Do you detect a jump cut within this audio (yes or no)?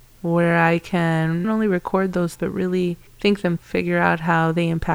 yes